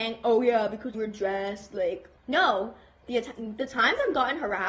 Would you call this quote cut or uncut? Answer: cut